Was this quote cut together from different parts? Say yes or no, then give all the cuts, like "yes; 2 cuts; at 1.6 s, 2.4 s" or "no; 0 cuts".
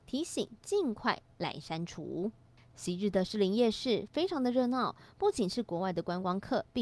no; 0 cuts